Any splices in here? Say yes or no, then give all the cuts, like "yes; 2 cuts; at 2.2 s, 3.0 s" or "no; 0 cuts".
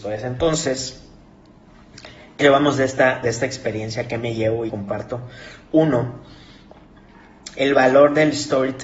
yes; 2 cuts; at 2.4 s, 4.7 s